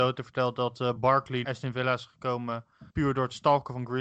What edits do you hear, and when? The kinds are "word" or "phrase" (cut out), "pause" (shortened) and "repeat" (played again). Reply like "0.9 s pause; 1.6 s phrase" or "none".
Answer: 1.4 s word; 2.9 s pause